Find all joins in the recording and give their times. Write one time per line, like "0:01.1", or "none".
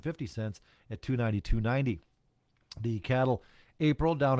0:03.0